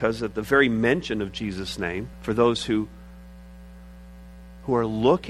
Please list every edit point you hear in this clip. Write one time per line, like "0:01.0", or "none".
0:02.1